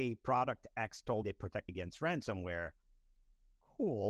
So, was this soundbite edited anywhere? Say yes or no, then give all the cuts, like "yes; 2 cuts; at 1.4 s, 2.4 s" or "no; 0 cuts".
yes; 2 cuts; at 1.2 s, 1.7 s